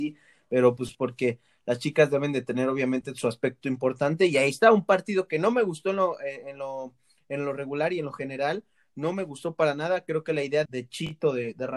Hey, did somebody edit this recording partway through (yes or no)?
yes